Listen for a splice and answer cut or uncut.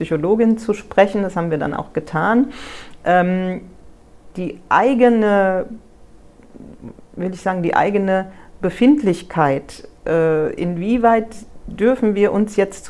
uncut